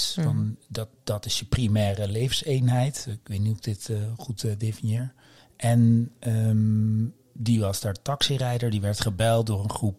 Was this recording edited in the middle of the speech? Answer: yes; 1 cut; at 5.4 s

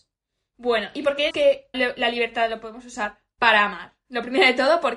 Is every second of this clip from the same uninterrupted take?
no; 2 cuts; at 1.3 s, 1.7 s

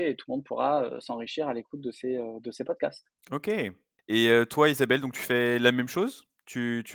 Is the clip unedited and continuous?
no; 1 cut; at 3.2 s

